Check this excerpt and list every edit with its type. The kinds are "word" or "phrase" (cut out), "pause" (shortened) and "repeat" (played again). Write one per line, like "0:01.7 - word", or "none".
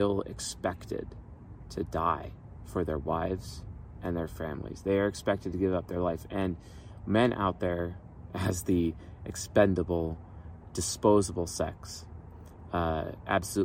none